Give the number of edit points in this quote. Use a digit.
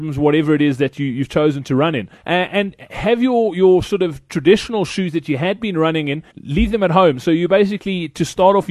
2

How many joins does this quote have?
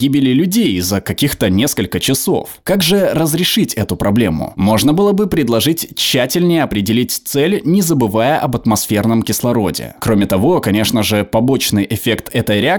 0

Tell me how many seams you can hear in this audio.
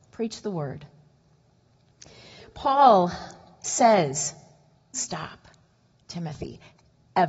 1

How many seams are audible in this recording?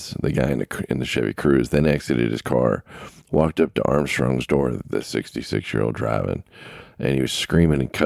0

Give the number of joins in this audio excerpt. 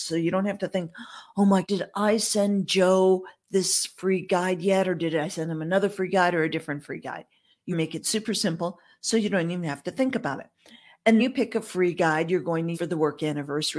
4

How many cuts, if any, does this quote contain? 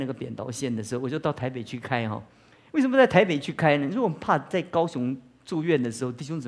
0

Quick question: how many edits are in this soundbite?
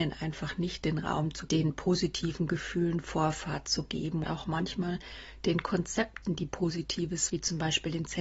3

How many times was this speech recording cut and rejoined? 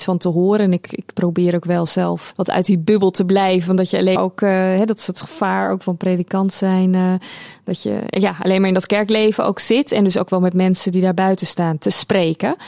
3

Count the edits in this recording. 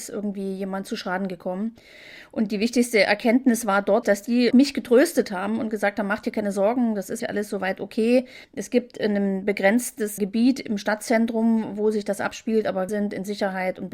6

